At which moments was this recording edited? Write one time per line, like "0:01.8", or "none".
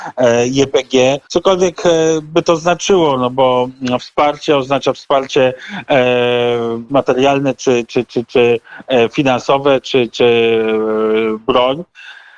0:01.2
0:06.9